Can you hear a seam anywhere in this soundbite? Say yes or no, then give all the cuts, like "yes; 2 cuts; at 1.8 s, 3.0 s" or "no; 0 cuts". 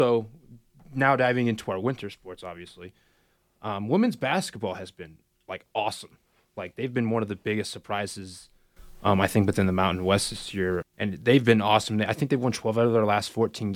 no; 0 cuts